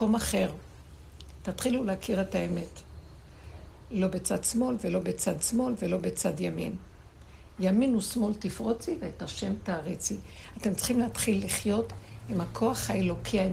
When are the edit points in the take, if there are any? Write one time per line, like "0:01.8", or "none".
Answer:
0:05.4